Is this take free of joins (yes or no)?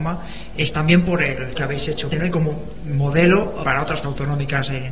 no